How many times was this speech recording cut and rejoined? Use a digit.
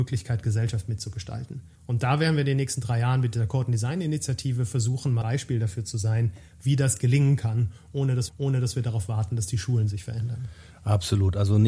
3